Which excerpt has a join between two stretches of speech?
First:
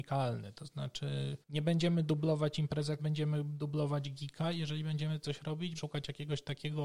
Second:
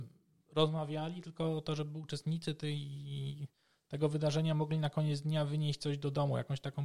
first; 3 cuts; at 1.4 s, 3.0 s, 5.8 s

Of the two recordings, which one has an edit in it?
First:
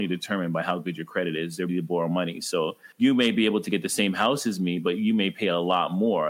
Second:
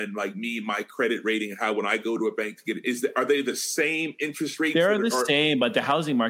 first; 1 cut; at 1.7 s

